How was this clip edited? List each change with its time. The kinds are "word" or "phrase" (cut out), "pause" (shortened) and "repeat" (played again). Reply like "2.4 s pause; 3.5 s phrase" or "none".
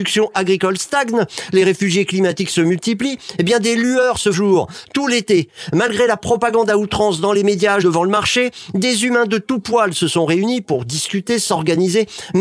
4.3 s word; 7.8 s word